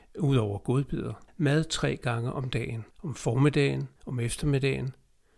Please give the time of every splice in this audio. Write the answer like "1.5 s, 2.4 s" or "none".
1.3 s, 2.9 s, 4.0 s